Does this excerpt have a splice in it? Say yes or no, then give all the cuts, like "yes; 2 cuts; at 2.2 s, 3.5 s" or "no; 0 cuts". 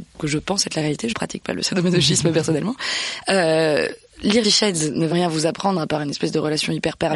yes; 3 cuts; at 1.1 s, 4.4 s, 5.1 s